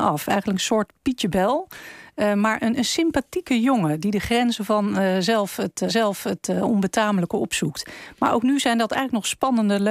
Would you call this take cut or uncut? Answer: cut